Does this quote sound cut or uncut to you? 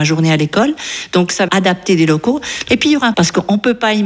cut